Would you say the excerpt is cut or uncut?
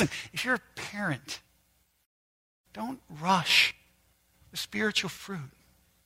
uncut